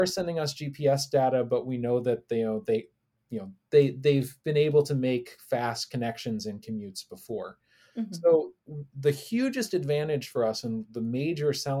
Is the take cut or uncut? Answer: uncut